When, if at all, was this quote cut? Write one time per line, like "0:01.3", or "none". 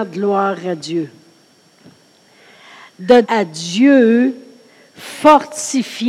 0:03.2